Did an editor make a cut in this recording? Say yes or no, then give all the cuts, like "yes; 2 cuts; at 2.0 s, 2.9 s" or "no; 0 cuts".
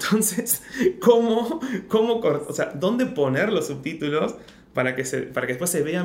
no; 0 cuts